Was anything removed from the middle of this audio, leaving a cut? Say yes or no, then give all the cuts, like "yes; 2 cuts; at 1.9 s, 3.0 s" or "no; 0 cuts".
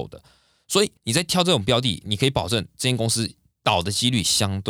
yes; 1 cut; at 1.0 s